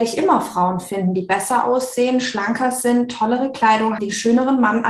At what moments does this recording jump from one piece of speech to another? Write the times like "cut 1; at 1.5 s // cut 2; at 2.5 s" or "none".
cut 1; at 4.0 s